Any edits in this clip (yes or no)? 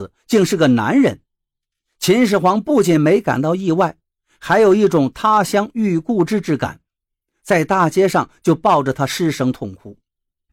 no